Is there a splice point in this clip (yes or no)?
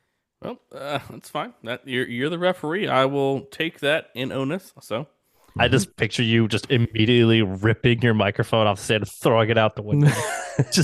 yes